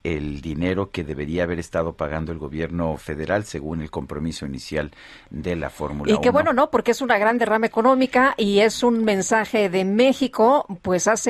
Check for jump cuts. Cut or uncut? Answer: uncut